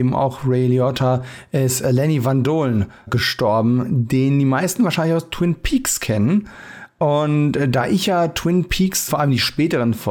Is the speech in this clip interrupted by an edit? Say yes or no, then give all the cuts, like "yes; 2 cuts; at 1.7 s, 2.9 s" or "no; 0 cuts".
yes; 2 cuts; at 3.1 s, 9.1 s